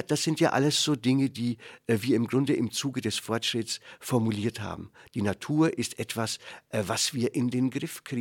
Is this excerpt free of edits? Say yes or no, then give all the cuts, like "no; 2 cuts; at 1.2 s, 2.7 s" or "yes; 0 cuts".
yes; 0 cuts